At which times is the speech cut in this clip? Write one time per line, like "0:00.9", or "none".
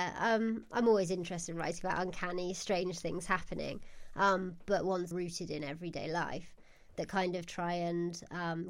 0:05.1